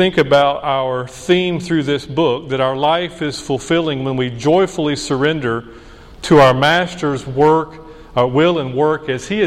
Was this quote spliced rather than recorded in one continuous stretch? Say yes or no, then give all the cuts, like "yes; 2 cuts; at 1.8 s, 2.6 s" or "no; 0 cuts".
no; 0 cuts